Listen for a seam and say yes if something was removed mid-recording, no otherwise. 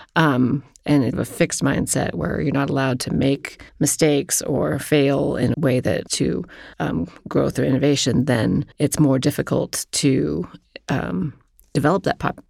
yes